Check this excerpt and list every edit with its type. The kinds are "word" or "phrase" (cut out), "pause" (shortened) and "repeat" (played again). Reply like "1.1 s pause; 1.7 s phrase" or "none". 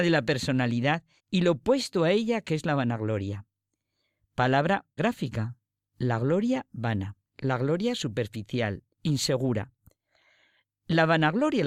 1.2 s pause; 5.0 s word; 7.3 s pause